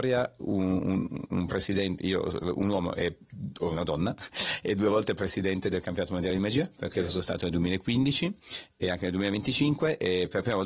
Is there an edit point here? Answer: no; 0 cuts

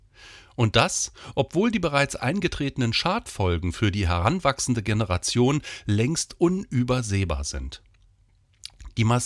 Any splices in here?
no; 0 cuts

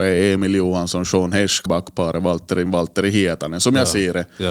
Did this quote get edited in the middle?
yes; 2 cuts; at 1.7 s, 2.7 s

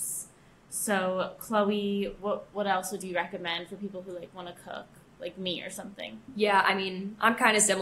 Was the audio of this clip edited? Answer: yes; 1 cut; at 6.2 s

